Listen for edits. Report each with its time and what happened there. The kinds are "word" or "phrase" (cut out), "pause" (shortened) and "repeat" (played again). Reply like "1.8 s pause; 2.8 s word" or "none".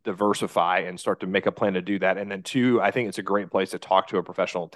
none